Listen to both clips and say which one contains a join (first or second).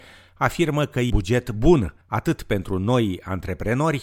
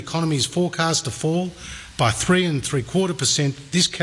first